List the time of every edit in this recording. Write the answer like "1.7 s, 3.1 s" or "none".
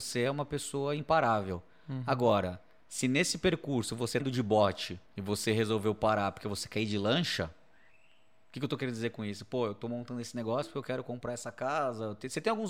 4.2 s, 5.1 s, 7.9 s